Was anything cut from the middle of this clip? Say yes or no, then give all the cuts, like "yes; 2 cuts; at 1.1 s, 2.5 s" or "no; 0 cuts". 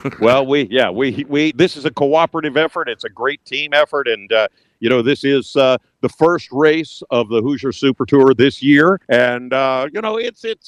yes; 1 cut; at 9.0 s